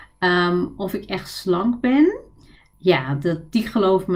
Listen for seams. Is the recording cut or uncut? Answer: cut